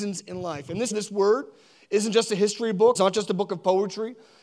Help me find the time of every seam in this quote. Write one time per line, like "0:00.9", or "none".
0:00.9
0:03.0